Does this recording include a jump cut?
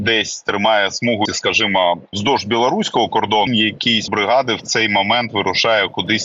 yes; 4 cuts; at 1.3 s, 2.1 s, 3.5 s, 4.1 s

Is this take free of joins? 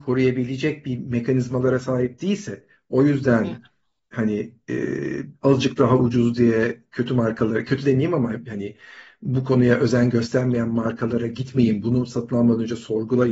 yes; 0 cuts

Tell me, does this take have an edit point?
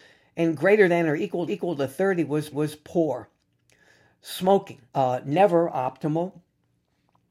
yes; 3 cuts; at 1.5 s, 2.5 s, 4.9 s

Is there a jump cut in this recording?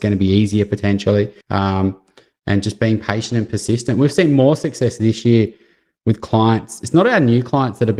yes; 1 cut; at 1.4 s

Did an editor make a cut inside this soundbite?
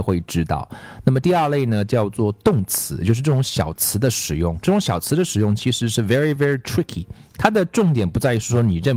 no; 0 cuts

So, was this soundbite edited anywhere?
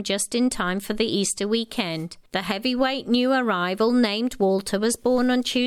yes; 1 cut; at 2.3 s

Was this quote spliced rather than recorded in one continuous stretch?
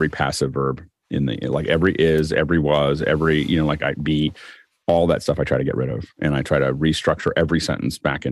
no; 0 cuts

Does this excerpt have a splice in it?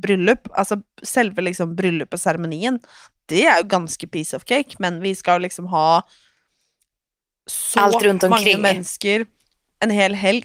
no; 0 cuts

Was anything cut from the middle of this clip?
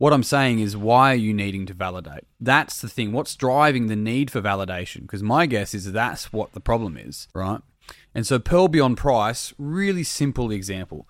yes; 2 cuts; at 2.3 s, 7.3 s

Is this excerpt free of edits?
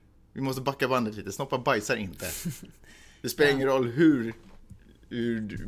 yes; 0 cuts

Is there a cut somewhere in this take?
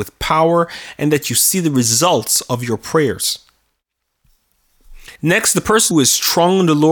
yes; 2 cuts; at 5.2 s, 5.9 s

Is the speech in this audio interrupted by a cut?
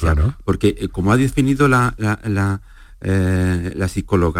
no; 0 cuts

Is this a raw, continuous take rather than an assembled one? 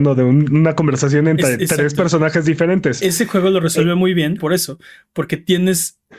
no; 1 cut; at 4.4 s

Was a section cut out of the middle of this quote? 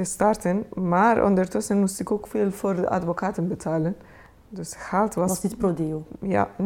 no; 0 cuts

